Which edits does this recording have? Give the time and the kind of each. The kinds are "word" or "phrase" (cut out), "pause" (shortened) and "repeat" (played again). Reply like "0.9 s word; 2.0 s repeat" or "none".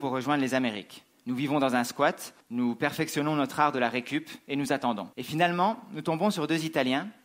2.4 s pause; 5.1 s pause